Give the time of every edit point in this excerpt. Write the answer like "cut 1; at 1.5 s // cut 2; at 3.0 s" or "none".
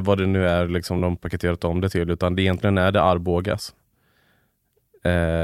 none